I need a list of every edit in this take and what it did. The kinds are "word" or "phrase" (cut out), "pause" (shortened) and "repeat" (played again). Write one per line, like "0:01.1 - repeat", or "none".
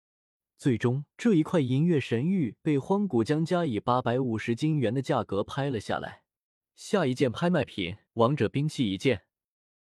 0:01.1 - pause
0:06.5 - pause
0:08.1 - pause